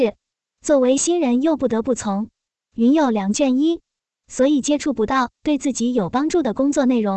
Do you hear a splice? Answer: no; 0 cuts

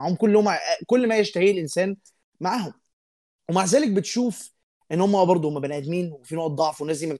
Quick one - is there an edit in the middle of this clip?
no; 0 cuts

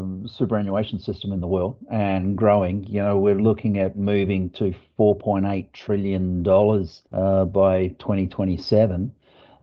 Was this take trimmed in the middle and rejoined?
yes; 1 cut; at 7.1 s

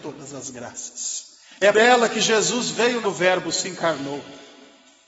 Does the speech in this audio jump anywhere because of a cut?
yes; 2 cuts; at 1.7 s, 3.0 s

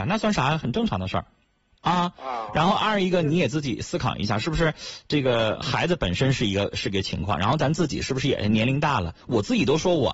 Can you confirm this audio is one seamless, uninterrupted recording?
yes; 0 cuts

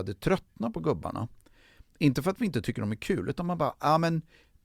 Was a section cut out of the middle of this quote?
no; 0 cuts

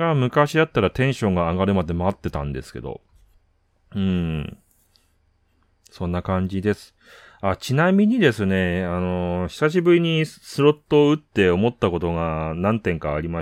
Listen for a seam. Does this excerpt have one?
no; 0 cuts

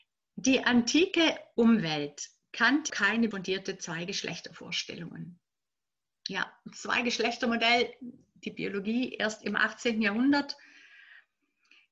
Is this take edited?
yes; 2 cuts; at 2.9 s, 3.3 s

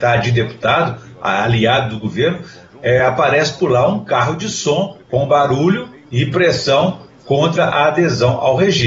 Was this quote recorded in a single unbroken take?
yes; 0 cuts

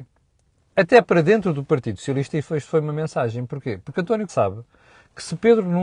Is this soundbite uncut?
no; 1 cut; at 4.3 s

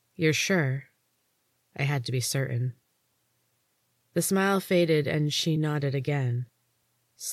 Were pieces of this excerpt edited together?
no; 0 cuts

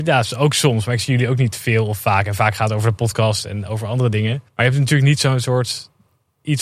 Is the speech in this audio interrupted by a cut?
yes; 1 cut; at 4.5 s

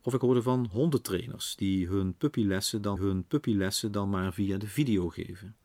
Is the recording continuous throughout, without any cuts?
no; 1 cut; at 3.0 s

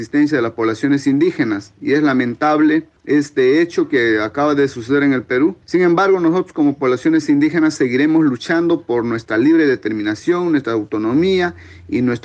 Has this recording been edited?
yes; 2 cuts; at 3.0 s, 5.6 s

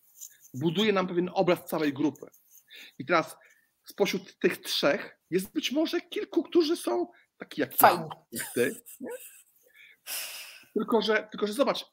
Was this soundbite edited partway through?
yes; 1 cut; at 5.2 s

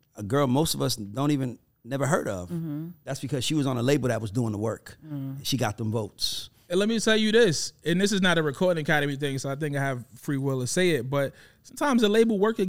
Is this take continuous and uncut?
yes; 0 cuts

